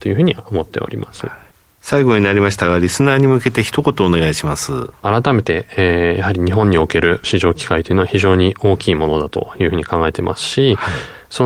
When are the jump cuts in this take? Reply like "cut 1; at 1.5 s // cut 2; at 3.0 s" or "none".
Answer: none

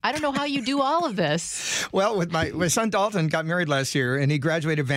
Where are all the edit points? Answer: none

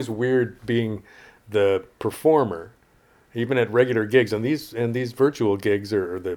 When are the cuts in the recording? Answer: none

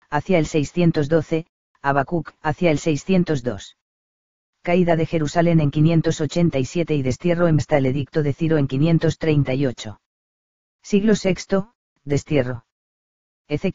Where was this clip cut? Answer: cut 1; at 2.4 s // cut 2; at 7.6 s

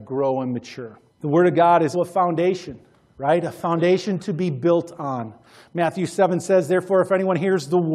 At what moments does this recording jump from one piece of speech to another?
cut 1; at 1.1 s // cut 2; at 1.9 s

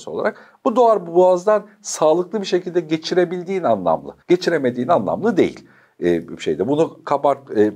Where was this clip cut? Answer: cut 1; at 4.2 s

